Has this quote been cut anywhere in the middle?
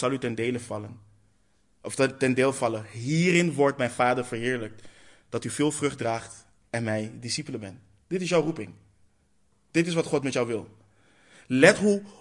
no; 0 cuts

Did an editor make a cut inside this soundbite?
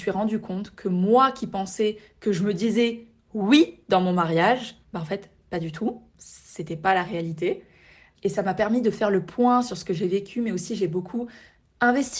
yes; 2 cuts; at 4.8 s, 6.1 s

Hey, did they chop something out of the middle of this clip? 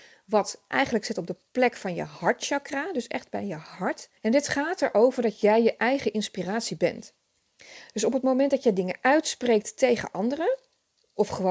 yes; 1 cut; at 4.2 s

